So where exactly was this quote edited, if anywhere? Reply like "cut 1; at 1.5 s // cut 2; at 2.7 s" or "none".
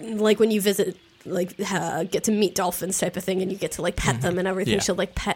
none